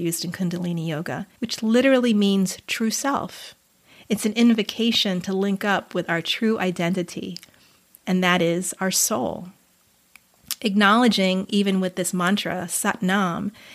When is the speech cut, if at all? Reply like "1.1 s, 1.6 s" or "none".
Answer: 1.4 s